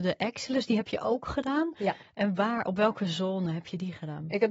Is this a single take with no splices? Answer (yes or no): yes